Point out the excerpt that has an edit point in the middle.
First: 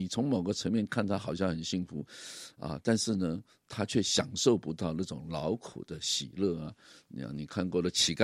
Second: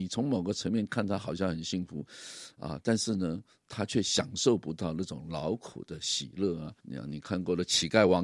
second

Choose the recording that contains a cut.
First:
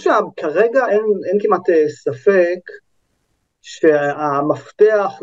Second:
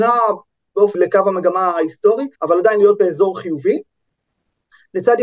second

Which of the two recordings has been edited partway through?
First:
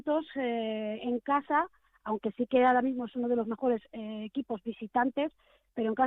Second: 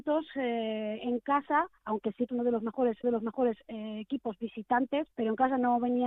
second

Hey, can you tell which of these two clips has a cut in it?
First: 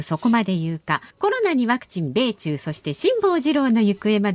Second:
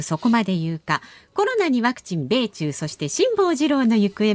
first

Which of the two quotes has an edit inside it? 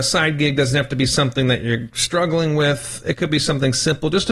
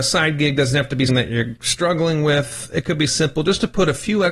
second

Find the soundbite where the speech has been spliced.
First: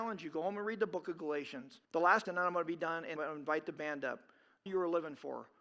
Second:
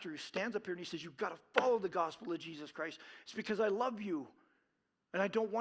first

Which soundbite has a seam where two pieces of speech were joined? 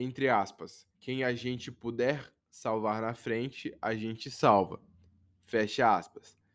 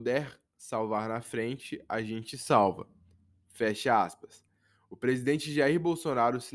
first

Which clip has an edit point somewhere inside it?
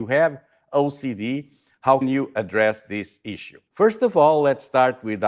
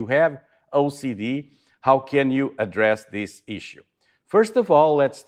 first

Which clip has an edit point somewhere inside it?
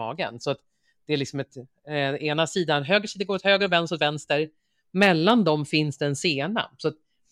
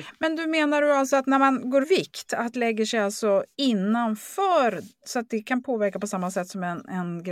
second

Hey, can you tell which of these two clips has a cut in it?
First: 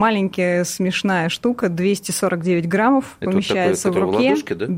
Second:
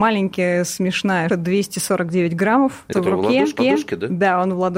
second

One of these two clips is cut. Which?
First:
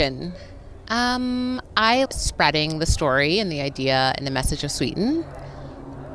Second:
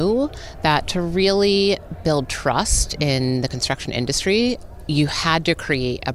first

